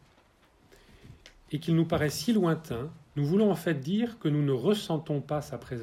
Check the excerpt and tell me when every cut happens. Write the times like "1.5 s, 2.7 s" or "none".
3.0 s